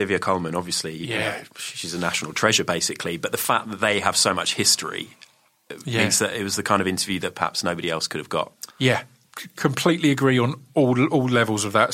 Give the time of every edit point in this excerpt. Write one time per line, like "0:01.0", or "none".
0:01.5
0:08.7

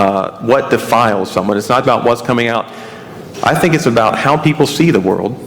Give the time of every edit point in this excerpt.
0:01.8

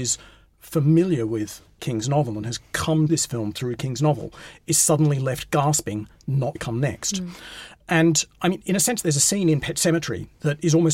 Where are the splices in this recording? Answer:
0:03.1
0:06.6

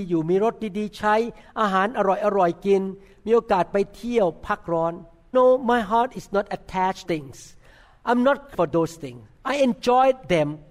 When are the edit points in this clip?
0:05.3
0:07.0
0:08.5

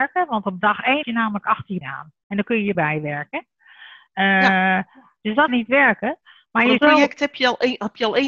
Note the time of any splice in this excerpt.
0:01.0
0:01.8
0:02.7
0:05.5
0:06.8

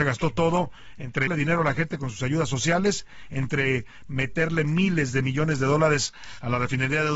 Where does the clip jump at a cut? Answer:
0:01.3

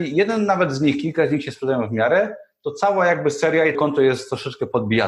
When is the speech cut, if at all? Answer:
0:03.7

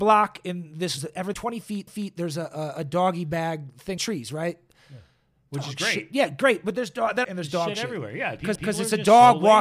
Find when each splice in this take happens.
0:01.0
0:01.3
0:01.9
0:04.0
0:05.5
0:07.2
0:08.6

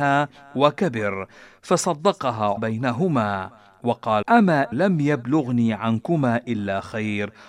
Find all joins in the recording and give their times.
0:02.6
0:04.2
0:04.7

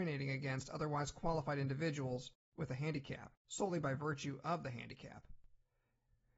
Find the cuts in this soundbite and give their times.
0:03.4

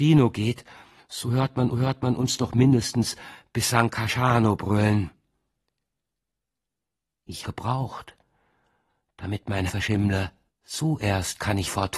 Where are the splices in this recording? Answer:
0:01.7
0:07.4
0:09.7
0:10.5

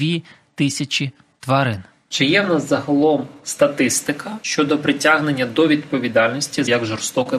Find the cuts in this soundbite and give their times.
none

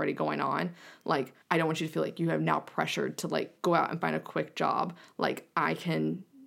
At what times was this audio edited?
0:01.4

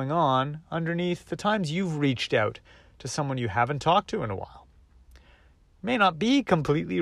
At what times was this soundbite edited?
none

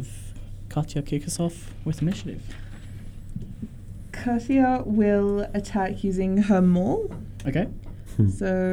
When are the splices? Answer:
none

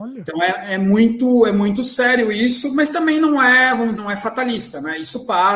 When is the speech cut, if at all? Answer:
0:04.0

